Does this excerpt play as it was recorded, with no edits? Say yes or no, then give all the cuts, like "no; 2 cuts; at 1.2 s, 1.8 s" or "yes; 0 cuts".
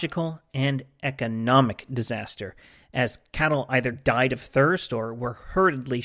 yes; 0 cuts